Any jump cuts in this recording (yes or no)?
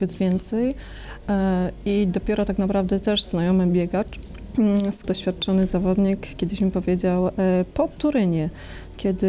yes